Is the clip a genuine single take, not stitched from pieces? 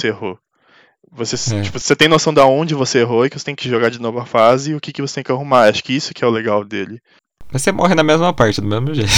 yes; 0 cuts

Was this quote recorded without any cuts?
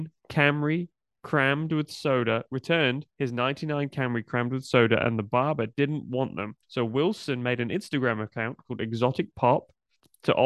no; 3 cuts; at 1.1 s, 3.1 s, 6.6 s

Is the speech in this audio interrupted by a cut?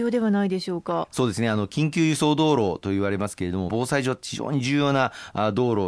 yes; 1 cut; at 3.7 s

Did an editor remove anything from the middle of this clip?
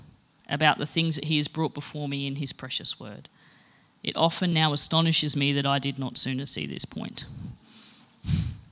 no; 0 cuts

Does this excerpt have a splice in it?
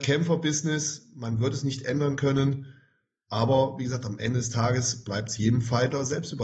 no; 0 cuts

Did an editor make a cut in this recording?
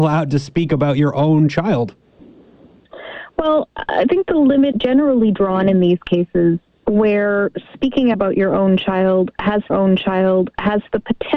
yes; 3 cuts; at 4.7 s, 8.1 s, 9.7 s

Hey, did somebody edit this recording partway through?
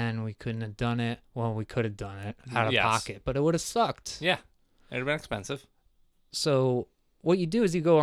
no; 0 cuts

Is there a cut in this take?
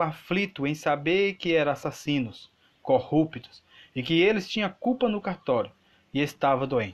no; 0 cuts

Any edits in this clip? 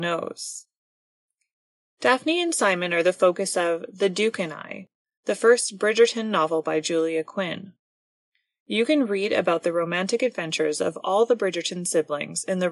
no; 0 cuts

